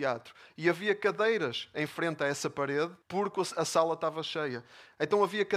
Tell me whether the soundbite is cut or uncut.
cut